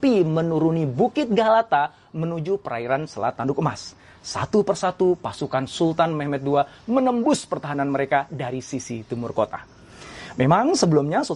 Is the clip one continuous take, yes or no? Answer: yes